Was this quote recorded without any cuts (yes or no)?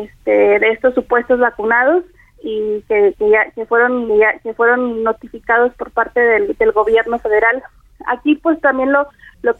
no